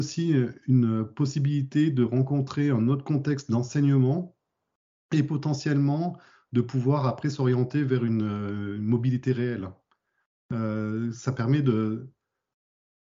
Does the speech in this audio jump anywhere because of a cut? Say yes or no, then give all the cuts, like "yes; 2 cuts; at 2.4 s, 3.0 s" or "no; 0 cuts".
no; 0 cuts